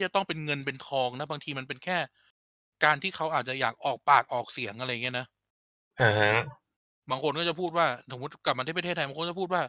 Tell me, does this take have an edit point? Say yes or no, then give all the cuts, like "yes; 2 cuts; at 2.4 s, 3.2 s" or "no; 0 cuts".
no; 0 cuts